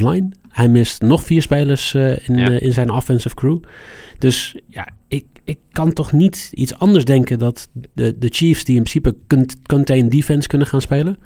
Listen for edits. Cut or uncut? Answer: uncut